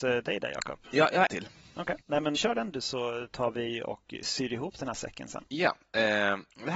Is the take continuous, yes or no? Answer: no